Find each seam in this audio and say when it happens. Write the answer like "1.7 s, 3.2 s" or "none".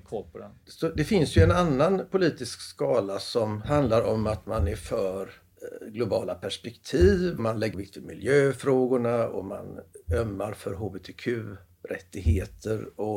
7.4 s, 7.7 s